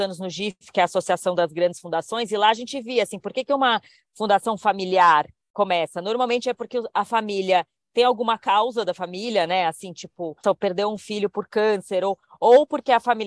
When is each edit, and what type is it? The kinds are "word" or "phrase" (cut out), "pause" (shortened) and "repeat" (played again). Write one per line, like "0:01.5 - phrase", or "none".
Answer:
0:10.4 - word